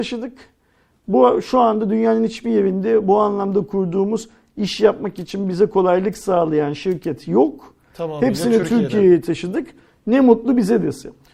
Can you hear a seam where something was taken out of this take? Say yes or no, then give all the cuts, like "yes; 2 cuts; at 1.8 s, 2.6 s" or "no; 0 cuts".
no; 0 cuts